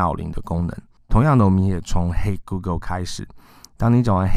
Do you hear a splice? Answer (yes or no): no